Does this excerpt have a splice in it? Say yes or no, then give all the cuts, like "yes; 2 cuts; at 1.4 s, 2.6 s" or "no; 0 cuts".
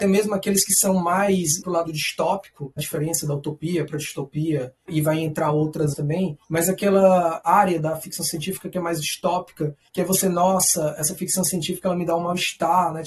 yes; 3 cuts; at 1.6 s, 2.8 s, 5.9 s